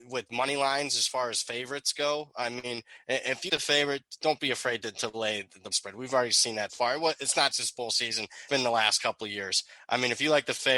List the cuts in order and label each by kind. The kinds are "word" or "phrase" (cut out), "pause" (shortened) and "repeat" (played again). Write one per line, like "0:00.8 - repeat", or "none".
0:03.5 - word
0:05.7 - word
0:06.7 - word
0:07.5 - word
0:08.5 - word